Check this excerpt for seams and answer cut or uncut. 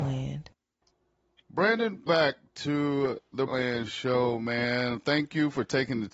cut